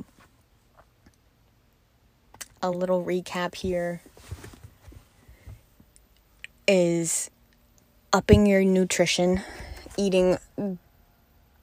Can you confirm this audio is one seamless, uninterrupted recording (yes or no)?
yes